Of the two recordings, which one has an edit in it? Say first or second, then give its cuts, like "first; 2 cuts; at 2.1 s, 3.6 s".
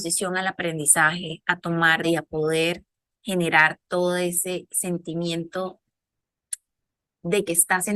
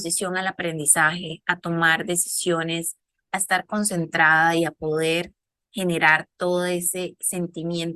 first; 1 cut; at 2.0 s